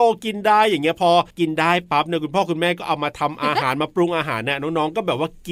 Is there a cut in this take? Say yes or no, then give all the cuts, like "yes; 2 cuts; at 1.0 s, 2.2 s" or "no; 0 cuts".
yes; 1 cut; at 1.3 s